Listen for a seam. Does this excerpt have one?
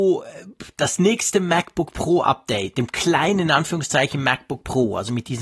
yes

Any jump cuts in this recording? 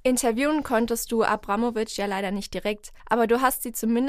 yes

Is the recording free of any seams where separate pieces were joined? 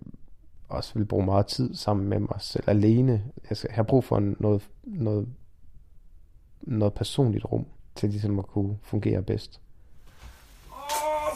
yes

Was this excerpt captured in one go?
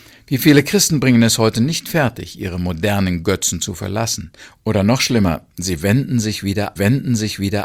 no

